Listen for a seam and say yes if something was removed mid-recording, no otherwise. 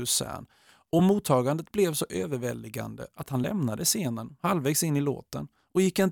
no